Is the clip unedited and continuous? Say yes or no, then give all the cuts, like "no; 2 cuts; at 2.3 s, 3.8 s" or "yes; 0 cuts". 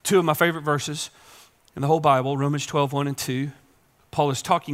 yes; 0 cuts